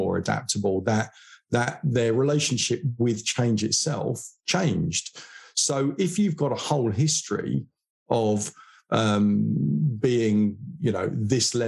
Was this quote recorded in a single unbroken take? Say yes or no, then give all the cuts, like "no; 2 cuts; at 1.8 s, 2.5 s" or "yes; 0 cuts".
yes; 0 cuts